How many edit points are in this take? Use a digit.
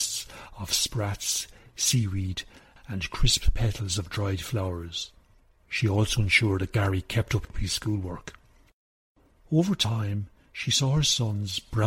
0